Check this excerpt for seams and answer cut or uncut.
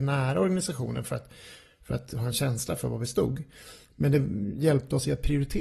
uncut